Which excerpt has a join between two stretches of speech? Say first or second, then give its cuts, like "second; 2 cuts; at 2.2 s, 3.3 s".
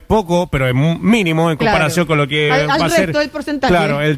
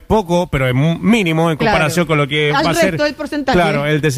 second; 1 cut; at 2.5 s